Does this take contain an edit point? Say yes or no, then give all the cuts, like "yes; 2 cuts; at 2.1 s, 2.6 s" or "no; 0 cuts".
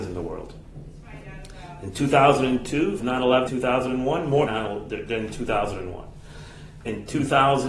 yes; 3 cuts; at 3.0 s, 3.5 s, 4.5 s